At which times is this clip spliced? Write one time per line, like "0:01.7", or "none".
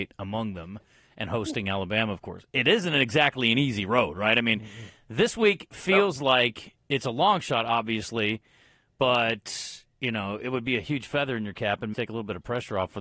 0:11.9